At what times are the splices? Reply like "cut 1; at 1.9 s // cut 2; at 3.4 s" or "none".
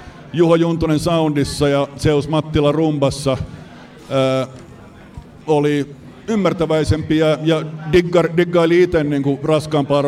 none